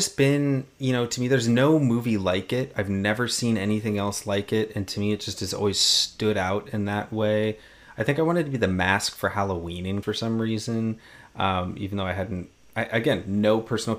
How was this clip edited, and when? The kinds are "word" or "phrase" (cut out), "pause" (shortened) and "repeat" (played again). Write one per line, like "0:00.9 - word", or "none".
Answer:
0:10.0 - word